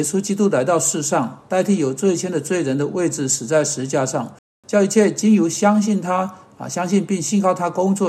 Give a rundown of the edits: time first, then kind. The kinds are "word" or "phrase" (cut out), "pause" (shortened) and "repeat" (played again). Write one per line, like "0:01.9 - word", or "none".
none